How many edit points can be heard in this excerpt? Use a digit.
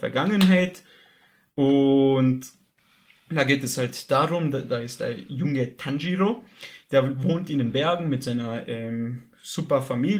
0